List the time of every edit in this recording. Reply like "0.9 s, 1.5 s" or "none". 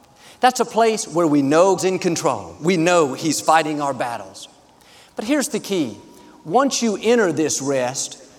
1.8 s

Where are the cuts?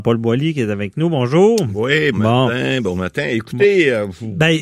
2.1 s

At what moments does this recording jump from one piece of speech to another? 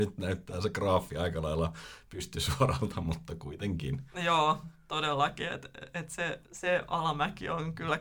6.4 s

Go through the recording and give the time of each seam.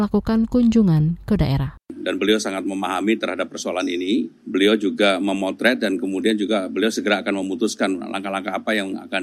1.8 s, 4.4 s

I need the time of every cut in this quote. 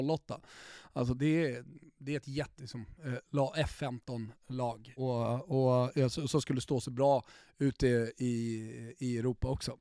1.2 s, 2.6 s, 5.0 s

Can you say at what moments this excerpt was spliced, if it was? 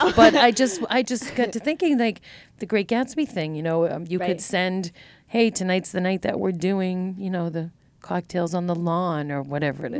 none

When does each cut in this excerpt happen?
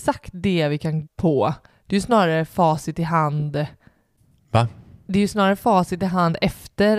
1.1 s

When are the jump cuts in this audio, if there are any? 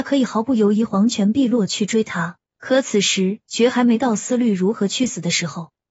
2.5 s

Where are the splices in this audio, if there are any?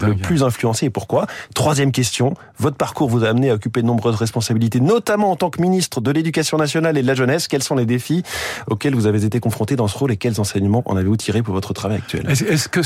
none

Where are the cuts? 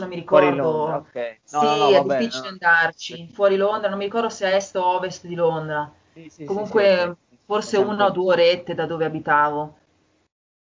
none

